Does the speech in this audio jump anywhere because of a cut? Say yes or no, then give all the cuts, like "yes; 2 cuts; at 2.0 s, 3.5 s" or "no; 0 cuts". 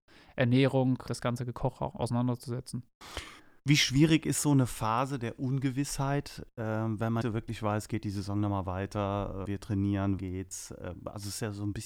yes; 5 cuts; at 1.1 s, 1.9 s, 7.2 s, 9.4 s, 10.2 s